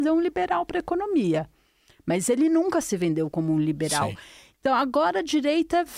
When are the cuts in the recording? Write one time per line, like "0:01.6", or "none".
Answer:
none